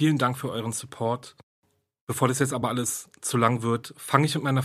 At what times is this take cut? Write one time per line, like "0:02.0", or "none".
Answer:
none